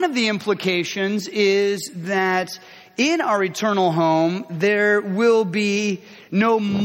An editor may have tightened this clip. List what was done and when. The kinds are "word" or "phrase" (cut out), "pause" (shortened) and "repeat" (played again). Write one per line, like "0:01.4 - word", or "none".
none